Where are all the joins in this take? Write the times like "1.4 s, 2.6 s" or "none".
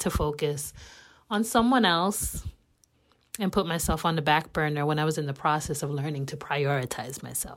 none